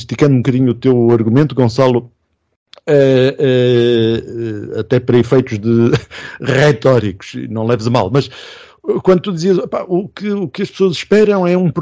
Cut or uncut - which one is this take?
uncut